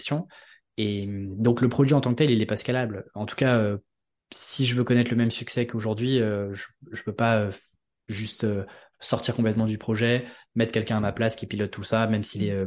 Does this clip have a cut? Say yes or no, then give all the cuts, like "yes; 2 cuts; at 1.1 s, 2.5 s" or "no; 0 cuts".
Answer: no; 0 cuts